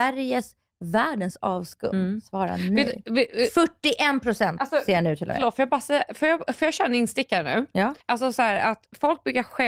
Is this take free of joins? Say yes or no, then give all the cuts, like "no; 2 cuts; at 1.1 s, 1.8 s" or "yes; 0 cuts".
no; 1 cut; at 8.0 s